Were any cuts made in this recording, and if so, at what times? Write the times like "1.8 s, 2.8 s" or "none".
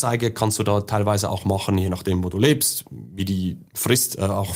none